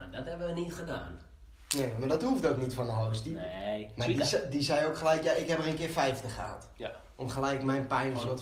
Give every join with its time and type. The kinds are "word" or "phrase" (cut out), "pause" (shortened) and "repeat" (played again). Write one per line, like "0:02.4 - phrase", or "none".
none